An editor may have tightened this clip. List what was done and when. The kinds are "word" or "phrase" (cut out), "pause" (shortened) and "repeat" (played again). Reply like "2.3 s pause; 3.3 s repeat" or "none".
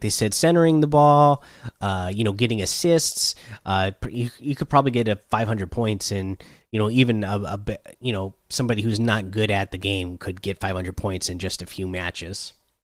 none